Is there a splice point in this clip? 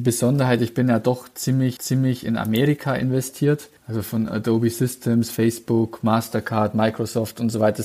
yes; 2 cuts; at 1.8 s, 3.8 s

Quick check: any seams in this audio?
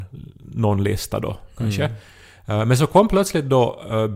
no; 0 cuts

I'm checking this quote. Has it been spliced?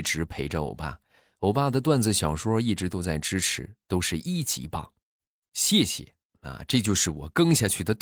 no; 0 cuts

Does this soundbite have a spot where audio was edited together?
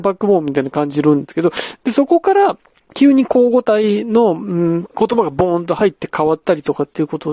yes; 2 cuts; at 2.6 s, 4.9 s

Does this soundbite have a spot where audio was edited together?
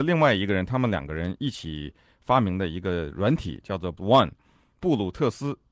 yes; 1 cut; at 4.0 s

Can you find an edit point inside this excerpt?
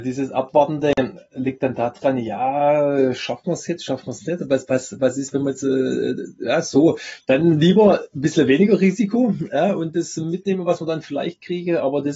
no; 0 cuts

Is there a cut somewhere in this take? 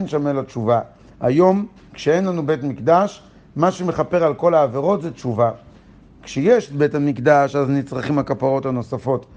no; 0 cuts

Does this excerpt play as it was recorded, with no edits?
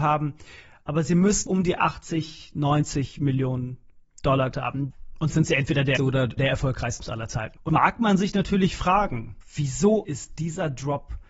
no; 8 cuts; at 1.5 s, 4.5 s, 5.3 s, 6.0 s, 6.4 s, 7.0 s, 7.7 s, 10.0 s

